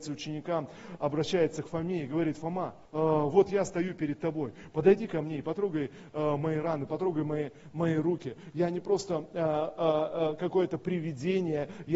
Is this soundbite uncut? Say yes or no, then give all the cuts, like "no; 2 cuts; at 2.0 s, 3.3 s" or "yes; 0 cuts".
no; 1 cut; at 2.9 s